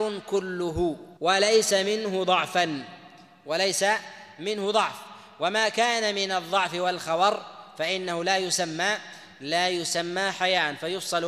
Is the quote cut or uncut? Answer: cut